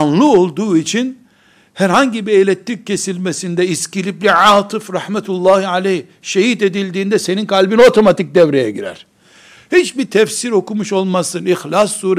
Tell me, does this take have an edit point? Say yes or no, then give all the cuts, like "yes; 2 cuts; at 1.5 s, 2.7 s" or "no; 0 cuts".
no; 0 cuts